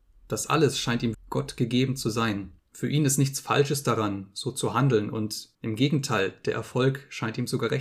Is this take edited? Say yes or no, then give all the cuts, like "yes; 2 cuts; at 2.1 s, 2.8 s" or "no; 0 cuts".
yes; 3 cuts; at 1.1 s, 2.6 s, 5.5 s